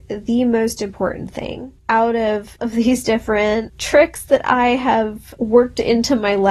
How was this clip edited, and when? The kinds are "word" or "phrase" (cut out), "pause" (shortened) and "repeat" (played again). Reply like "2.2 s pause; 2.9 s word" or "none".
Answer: 1.8 s pause; 2.6 s word